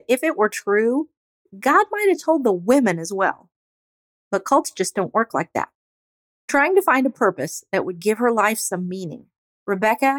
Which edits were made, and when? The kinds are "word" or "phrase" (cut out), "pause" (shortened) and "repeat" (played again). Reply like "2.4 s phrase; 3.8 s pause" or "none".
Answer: none